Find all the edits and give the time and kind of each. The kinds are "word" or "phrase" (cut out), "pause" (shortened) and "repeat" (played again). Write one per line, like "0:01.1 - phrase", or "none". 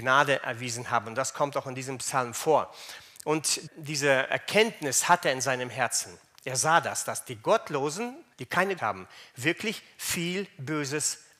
0:03.7 - word
0:08.3 - pause
0:08.8 - word